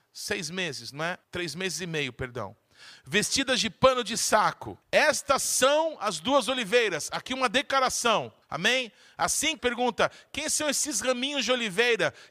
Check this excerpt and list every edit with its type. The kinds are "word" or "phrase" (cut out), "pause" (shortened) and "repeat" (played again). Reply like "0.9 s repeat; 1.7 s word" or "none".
1.2 s pause; 4.8 s pause; 8.4 s pause; 9.6 s phrase